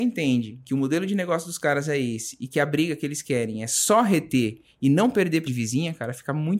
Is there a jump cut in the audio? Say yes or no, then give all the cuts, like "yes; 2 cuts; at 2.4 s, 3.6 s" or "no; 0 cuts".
yes; 1 cut; at 5.5 s